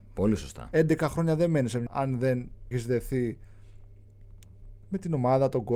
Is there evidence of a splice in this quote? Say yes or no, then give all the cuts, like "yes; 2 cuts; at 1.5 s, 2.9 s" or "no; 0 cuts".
yes; 2 cuts; at 1.9 s, 2.7 s